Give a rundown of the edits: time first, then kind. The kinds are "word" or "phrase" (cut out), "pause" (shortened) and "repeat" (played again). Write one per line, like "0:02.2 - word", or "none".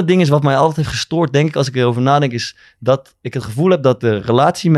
none